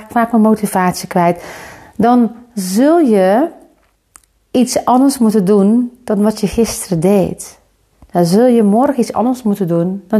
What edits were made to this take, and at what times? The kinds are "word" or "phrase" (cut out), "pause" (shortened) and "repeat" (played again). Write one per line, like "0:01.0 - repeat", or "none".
none